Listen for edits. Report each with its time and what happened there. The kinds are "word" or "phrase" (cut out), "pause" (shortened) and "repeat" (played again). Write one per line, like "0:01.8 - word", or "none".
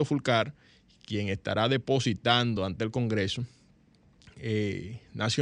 none